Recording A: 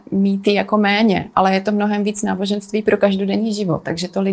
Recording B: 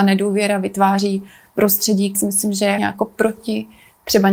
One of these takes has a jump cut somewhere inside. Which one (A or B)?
B